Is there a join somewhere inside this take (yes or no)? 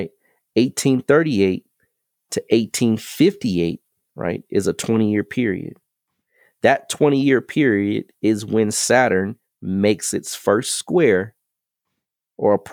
no